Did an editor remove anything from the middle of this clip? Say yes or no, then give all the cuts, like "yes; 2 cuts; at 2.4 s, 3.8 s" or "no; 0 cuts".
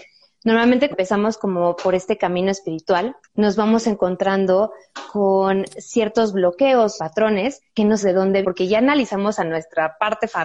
yes; 6 cuts; at 0.9 s, 3.2 s, 7.0 s, 7.7 s, 8.0 s, 8.4 s